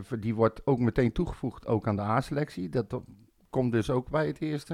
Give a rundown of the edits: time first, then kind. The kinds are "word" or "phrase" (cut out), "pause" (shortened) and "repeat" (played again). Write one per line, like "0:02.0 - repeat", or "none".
none